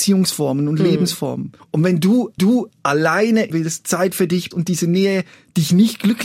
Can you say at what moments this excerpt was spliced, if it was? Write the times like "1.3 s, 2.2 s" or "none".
1.6 s, 2.4 s, 3.5 s, 4.5 s